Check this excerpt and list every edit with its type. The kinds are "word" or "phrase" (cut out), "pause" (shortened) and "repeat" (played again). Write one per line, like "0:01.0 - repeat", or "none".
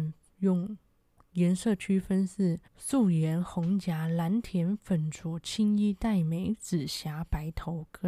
0:02.7 - pause

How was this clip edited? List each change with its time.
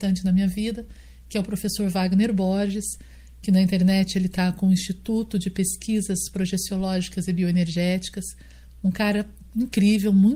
none

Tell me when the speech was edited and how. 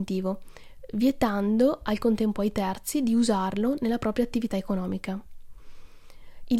none

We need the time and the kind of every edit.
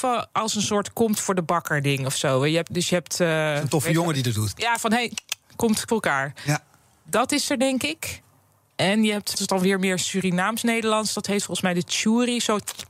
0:02.7 - word
0:05.9 - word
0:09.3 - phrase

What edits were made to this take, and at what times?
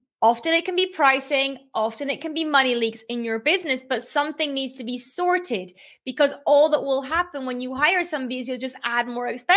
none

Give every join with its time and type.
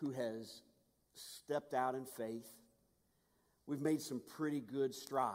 none

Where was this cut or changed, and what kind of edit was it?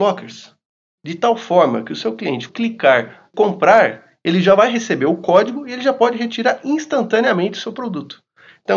0:02.5 - word

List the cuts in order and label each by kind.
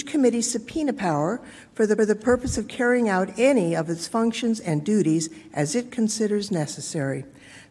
0:02.0 - repeat

